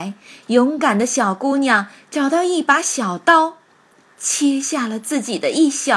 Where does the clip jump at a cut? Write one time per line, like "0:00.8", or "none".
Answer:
none

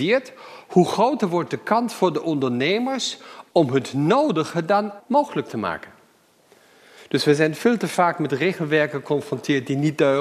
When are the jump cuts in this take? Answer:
0:05.0

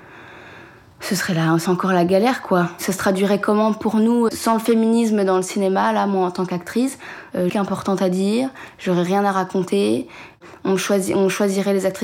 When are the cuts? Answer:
0:01.7
0:04.3
0:07.5

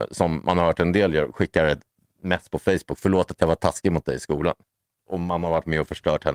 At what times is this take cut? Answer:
none

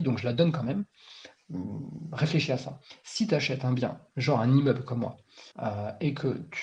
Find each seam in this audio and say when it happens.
0:05.5

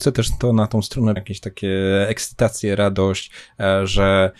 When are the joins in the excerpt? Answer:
0:01.2

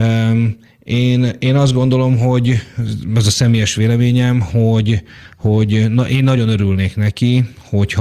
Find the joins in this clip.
none

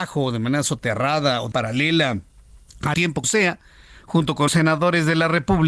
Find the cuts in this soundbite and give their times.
0:01.5
0:02.9
0:03.2
0:04.5

